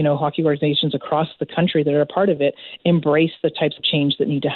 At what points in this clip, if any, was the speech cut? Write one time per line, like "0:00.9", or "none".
none